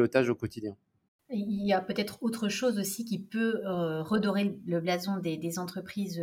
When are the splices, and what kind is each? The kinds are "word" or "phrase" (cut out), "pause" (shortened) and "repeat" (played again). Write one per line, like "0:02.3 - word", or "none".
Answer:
0:01.1 - pause

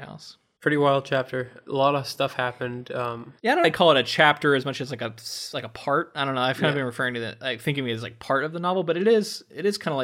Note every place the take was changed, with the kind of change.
0:03.6 - phrase

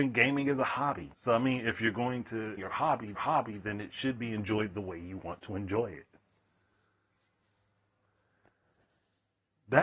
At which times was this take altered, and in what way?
0:01.1 - pause
0:02.6 - phrase
0:03.2 - repeat

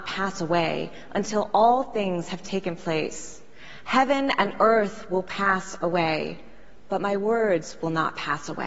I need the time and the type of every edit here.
none

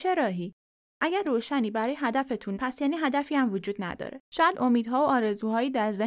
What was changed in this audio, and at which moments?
0:01.2 - word
0:02.5 - word
0:04.2 - pause

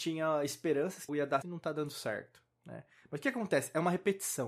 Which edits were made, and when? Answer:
0:01.1 - word
0:01.4 - word

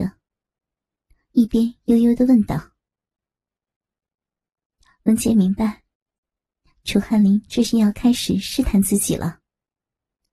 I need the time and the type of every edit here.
none

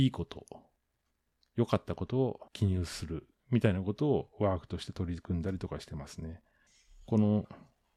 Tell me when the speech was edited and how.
0:02.5 - pause
0:06.7 - pause

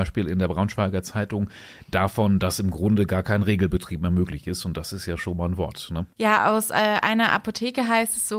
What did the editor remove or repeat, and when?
none

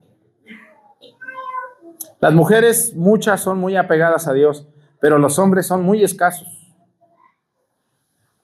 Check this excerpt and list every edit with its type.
none

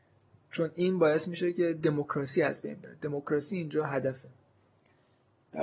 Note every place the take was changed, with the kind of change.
none

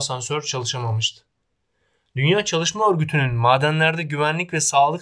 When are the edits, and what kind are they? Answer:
none

